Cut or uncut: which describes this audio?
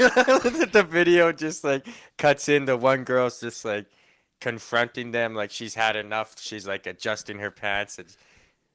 uncut